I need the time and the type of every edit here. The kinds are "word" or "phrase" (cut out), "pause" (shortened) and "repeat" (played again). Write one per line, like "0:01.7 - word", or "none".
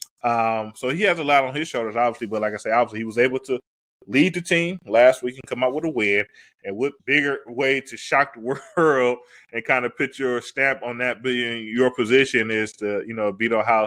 0:07.0 - pause